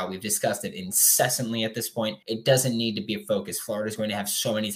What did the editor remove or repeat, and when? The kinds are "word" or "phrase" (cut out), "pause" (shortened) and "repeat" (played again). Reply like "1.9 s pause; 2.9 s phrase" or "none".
2.2 s pause